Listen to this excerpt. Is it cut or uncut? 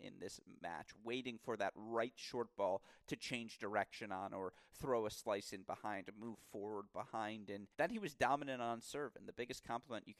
cut